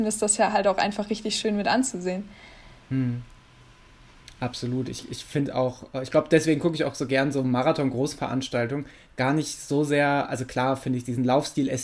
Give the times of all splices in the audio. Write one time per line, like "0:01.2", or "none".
none